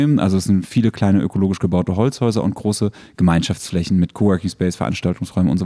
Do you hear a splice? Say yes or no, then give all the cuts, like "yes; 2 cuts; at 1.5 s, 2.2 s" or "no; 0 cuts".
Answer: no; 0 cuts